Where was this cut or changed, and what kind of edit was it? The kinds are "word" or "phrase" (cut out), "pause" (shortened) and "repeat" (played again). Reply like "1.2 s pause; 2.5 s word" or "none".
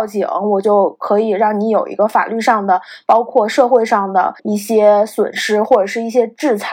4.4 s pause